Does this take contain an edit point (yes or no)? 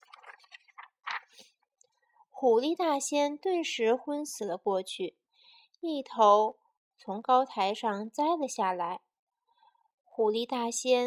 no